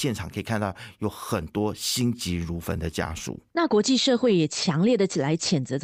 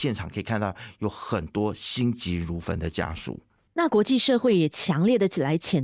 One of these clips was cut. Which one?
first; 1 cut; at 3.5 s

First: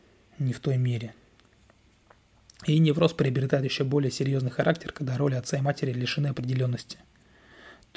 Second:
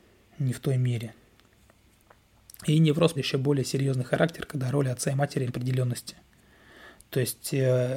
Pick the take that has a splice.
second; 2 cuts; at 3.1 s, 5.5 s

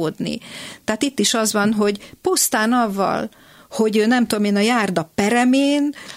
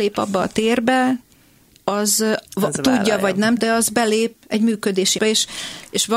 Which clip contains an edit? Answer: second; 4 cuts; at 2.5 s, 3.6 s, 4.3 s, 5.2 s

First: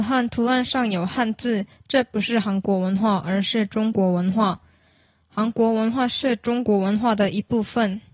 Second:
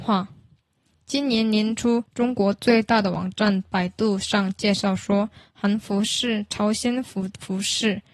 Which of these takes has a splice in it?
second; 1 cut; at 2.1 s

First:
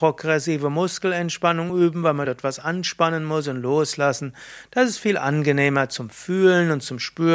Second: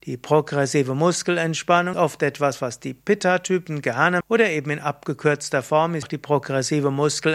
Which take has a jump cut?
second; 3 cuts; at 1.9 s, 4.2 s, 6.0 s

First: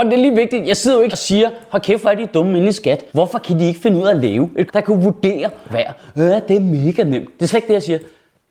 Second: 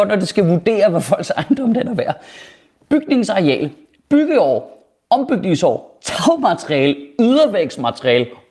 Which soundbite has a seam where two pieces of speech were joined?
first; 4 cuts; at 1.1 s, 3.1 s, 4.7 s, 5.7 s

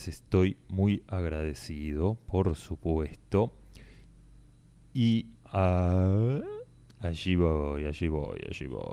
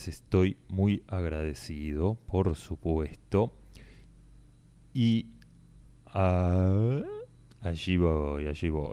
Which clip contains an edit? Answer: first; 1 cut; at 5.4 s

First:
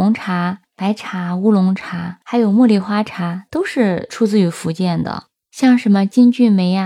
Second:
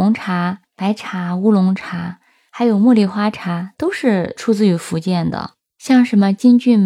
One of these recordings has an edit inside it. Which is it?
first; 1 cut; at 2.2 s

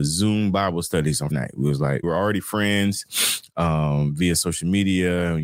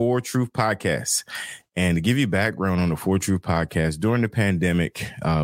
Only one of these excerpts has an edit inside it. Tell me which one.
first; 2 cuts; at 1.3 s, 2.0 s

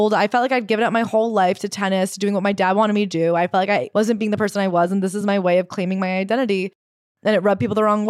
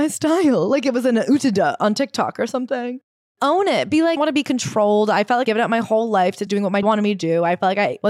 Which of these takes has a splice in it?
second; 4 cuts; at 4.2 s, 5.4 s, 6.5 s, 6.8 s

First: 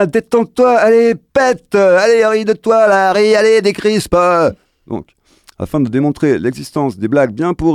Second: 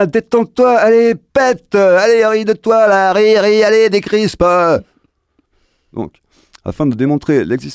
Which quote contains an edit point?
first; 2 cuts; at 3.1 s, 4.6 s

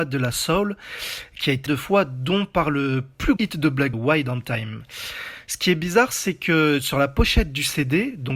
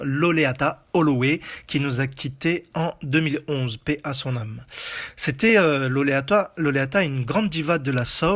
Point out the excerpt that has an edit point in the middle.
first; 3 cuts; at 1.7 s, 3.4 s, 3.9 s

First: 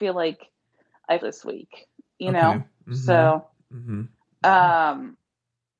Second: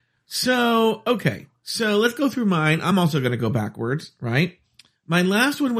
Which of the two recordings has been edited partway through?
first; 1 cut; at 1.2 s

